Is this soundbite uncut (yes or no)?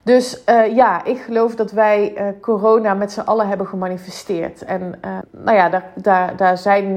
no